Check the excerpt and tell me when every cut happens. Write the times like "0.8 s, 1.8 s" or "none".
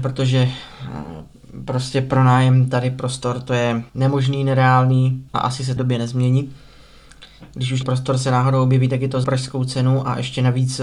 3.9 s, 5.3 s, 5.8 s, 7.8 s, 9.2 s